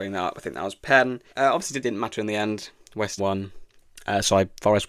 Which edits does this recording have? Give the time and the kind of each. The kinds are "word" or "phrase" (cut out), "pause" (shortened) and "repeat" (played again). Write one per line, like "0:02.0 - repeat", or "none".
0:01.3 - pause
0:01.8 - phrase
0:03.2 - word